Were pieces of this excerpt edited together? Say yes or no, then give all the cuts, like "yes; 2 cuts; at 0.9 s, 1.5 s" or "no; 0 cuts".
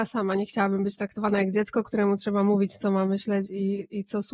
no; 0 cuts